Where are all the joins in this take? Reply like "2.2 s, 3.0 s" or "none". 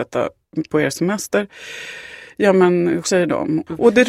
3.0 s

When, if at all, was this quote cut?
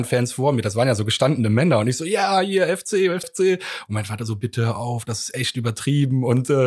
3.2 s

